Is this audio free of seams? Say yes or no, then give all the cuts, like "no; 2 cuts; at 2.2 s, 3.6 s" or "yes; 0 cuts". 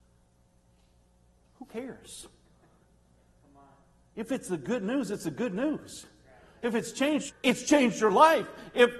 no; 1 cut; at 7.3 s